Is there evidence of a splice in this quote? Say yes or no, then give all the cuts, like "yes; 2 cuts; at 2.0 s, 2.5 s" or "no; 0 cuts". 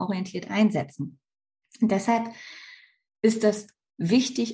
no; 0 cuts